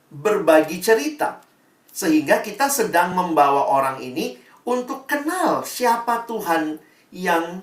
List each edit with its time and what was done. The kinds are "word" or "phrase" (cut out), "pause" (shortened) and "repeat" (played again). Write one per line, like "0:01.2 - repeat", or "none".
none